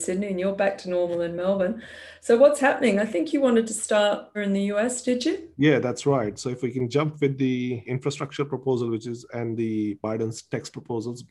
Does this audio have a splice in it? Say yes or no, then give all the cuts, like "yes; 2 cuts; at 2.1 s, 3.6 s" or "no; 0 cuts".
yes; 3 cuts; at 4.3 s, 5.5 s, 7.9 s